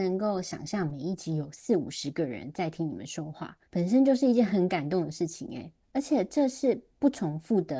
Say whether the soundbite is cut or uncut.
cut